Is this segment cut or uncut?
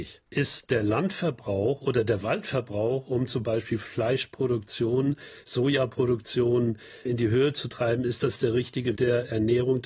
cut